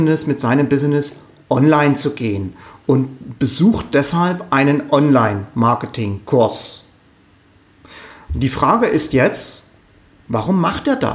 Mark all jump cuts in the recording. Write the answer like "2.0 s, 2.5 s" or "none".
none